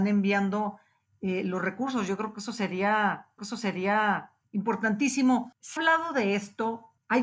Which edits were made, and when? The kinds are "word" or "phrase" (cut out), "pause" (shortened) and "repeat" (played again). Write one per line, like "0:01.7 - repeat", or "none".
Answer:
0:03.4 - repeat
0:05.8 - word